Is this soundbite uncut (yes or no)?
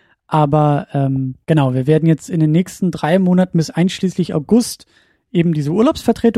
no